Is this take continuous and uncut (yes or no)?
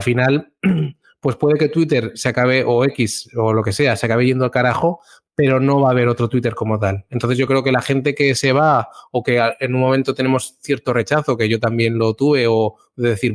yes